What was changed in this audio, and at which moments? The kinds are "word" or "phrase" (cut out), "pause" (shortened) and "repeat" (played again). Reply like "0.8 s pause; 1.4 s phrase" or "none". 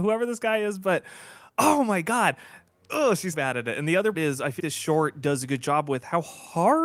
3.3 s word; 4.1 s word; 4.6 s word